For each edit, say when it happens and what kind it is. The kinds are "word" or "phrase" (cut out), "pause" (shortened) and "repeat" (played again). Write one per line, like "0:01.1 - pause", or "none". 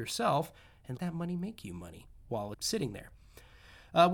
0:01.0 - word
0:02.5 - word